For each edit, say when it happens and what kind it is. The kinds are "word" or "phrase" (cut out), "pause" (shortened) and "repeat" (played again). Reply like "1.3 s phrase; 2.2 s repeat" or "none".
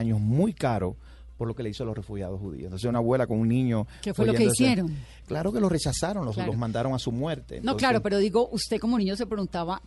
none